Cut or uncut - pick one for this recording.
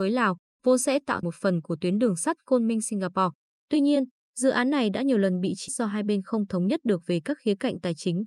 cut